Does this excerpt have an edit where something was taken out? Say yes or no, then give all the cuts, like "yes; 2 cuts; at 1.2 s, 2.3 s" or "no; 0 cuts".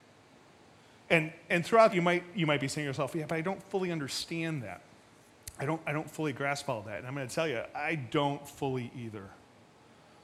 yes; 2 cuts; at 1.5 s, 1.9 s